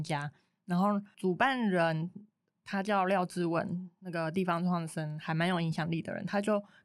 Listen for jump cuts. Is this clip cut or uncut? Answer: uncut